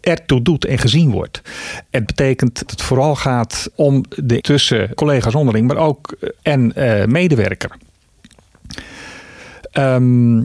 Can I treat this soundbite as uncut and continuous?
no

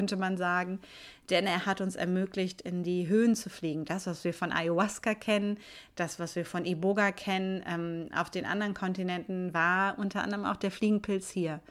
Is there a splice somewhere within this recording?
no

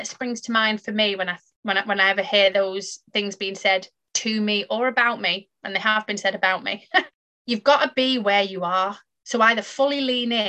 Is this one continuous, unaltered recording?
yes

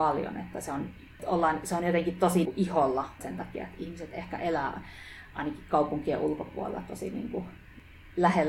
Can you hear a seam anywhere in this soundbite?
yes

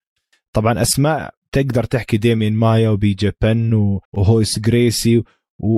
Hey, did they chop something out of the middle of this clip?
yes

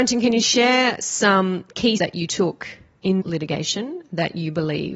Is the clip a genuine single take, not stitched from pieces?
no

